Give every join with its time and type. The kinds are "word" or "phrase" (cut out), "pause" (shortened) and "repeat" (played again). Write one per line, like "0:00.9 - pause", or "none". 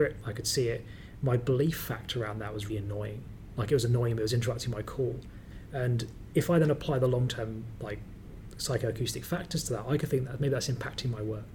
0:02.7 - word

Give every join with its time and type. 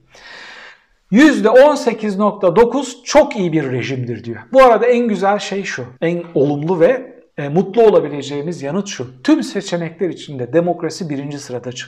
0:06.0 - pause
0:07.3 - pause

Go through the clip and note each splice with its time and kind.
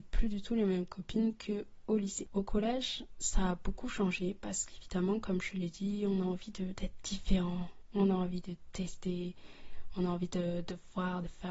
none

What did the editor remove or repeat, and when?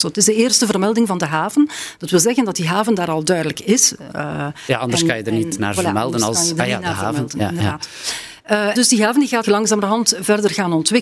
0:08.7 - word
0:09.4 - word

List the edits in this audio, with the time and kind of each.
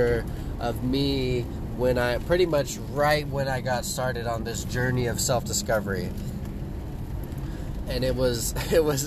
none

